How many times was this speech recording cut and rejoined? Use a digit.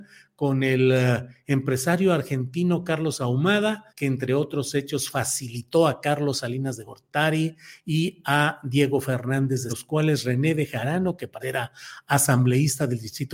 3